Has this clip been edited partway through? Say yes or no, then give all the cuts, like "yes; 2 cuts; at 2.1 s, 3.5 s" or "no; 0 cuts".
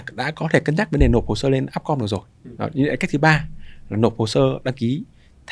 yes; 1 cut; at 2.5 s